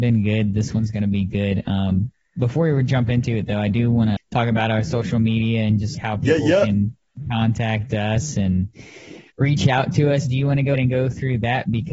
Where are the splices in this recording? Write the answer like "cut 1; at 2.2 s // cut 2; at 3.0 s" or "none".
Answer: cut 1; at 4.2 s // cut 2; at 5.9 s // cut 3; at 9.3 s // cut 4; at 10.7 s